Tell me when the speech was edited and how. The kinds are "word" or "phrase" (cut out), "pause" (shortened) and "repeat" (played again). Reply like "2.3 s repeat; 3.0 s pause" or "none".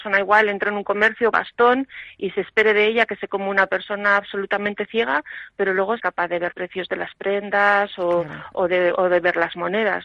1.3 s word; 3.3 s word; 6.0 s word; 6.5 s word